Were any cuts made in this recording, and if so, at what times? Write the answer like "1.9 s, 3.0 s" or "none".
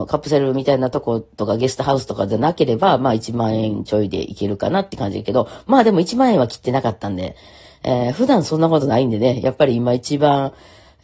none